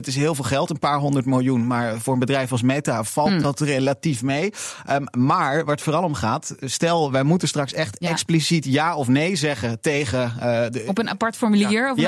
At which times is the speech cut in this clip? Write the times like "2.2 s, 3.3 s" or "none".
none